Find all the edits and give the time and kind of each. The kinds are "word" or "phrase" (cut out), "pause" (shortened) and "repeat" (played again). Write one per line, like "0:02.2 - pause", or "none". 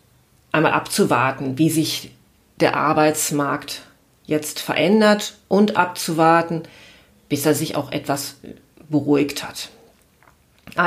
none